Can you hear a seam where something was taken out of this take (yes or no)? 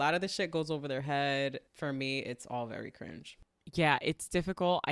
yes